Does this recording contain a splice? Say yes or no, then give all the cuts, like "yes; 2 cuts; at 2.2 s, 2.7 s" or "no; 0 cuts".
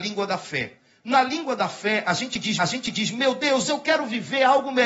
yes; 1 cut; at 2.6 s